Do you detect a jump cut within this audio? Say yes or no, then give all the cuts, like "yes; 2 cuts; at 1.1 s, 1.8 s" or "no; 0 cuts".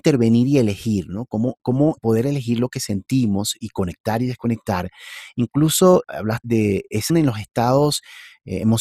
yes; 4 cuts; at 2.0 s, 6.0 s, 6.4 s, 7.1 s